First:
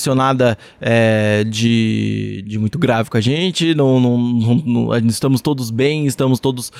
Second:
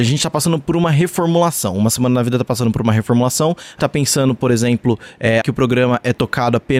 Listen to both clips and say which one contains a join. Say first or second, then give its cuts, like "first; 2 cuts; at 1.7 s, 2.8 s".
second; 2 cuts; at 3.8 s, 5.4 s